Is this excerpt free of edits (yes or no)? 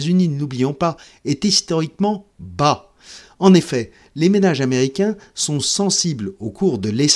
yes